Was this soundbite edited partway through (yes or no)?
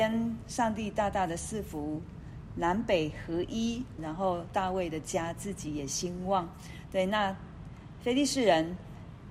yes